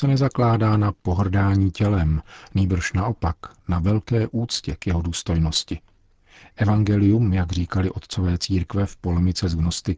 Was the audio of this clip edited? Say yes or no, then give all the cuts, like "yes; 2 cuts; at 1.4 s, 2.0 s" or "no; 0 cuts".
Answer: no; 0 cuts